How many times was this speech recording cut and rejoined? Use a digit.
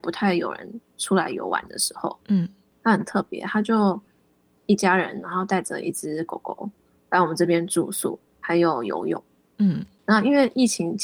1